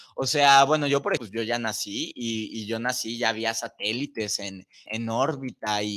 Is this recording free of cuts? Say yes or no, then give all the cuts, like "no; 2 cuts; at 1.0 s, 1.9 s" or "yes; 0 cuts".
no; 2 cuts; at 1.2 s, 4.9 s